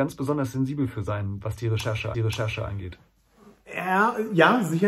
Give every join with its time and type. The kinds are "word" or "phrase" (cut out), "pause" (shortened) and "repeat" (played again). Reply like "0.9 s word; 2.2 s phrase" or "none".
2.1 s repeat